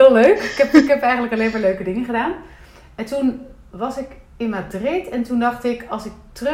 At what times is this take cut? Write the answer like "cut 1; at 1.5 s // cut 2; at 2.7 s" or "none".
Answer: none